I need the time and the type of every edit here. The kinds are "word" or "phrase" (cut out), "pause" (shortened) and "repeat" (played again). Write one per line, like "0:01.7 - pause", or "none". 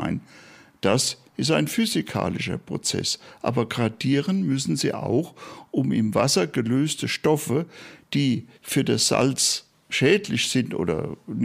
0:08.5 - pause
0:09.7 - word